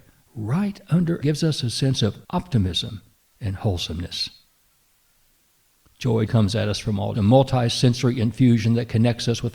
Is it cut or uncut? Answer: cut